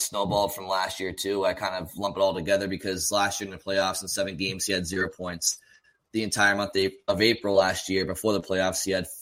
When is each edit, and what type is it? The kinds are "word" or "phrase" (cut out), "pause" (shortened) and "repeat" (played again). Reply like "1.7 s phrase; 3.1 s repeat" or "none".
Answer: none